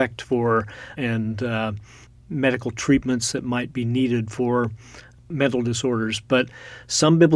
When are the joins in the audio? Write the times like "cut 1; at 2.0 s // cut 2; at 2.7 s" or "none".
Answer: cut 1; at 0.9 s